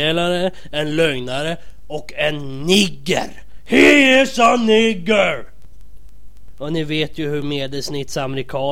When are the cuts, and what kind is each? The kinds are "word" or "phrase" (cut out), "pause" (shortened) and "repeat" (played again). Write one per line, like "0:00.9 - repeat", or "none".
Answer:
0:07.4 - word